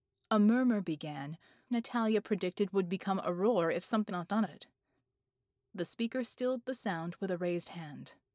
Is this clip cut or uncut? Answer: cut